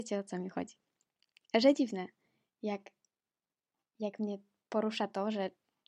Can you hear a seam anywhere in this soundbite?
yes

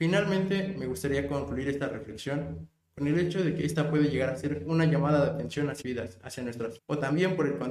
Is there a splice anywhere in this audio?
yes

